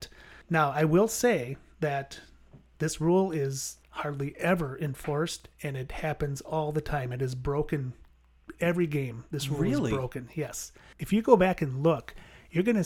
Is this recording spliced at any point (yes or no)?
yes